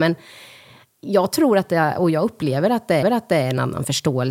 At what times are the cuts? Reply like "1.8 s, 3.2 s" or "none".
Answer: 3.0 s

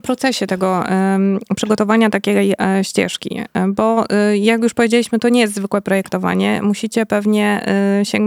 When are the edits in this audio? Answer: none

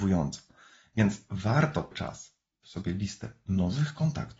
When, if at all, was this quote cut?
1.9 s, 2.6 s

